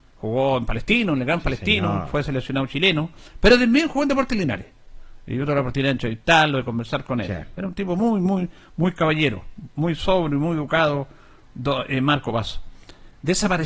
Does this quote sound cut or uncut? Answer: uncut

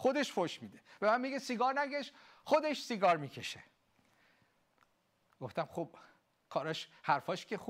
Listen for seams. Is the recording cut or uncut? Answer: uncut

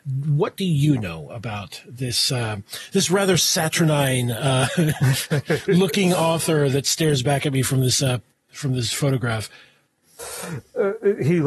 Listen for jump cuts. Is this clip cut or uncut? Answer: uncut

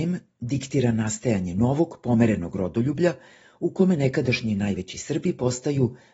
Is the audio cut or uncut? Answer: uncut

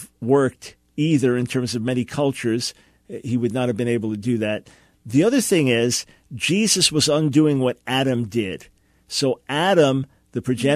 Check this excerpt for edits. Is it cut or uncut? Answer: uncut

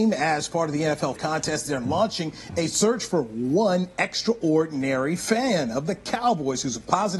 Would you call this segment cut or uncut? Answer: cut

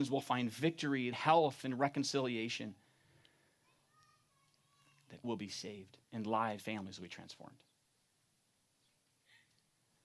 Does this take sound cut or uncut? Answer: cut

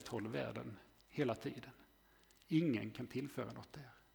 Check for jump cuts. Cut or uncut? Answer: uncut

